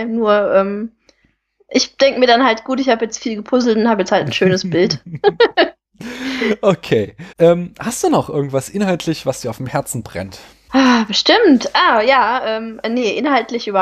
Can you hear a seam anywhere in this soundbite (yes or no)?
yes